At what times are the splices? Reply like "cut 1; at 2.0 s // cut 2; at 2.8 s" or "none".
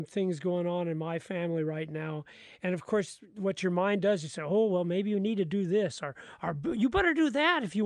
none